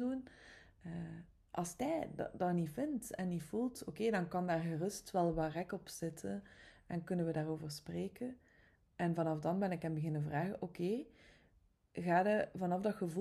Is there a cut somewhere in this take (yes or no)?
no